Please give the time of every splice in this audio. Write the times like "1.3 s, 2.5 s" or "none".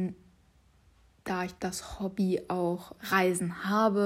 1.6 s, 3.0 s